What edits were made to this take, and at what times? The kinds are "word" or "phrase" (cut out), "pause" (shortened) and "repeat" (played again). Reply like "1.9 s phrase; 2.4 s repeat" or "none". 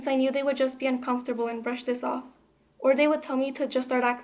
none